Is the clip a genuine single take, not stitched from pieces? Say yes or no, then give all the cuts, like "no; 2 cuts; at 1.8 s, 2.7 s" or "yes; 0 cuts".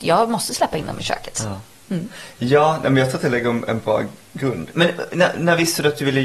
yes; 0 cuts